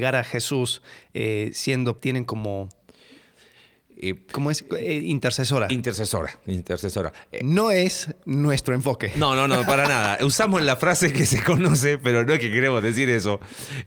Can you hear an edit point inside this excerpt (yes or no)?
yes